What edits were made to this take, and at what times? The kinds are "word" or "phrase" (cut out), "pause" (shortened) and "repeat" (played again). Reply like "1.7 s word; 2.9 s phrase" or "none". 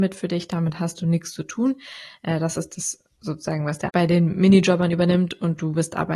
3.9 s word